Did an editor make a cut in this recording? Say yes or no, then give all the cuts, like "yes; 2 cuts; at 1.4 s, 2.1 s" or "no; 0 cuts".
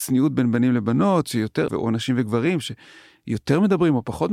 yes; 1 cut; at 1.7 s